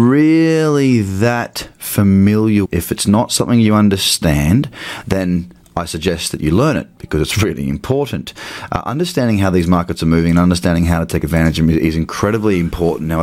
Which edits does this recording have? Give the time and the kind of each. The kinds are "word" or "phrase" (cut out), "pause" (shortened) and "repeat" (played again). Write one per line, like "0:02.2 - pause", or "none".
0:02.6 - word